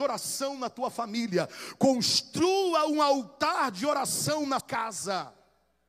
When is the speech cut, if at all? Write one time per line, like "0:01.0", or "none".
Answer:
0:04.6